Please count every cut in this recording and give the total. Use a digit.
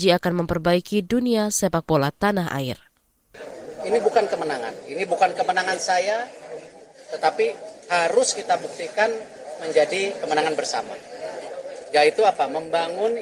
0